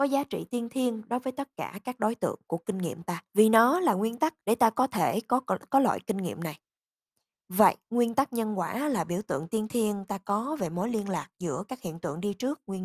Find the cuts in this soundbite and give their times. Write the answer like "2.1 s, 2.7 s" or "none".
3.3 s, 4.4 s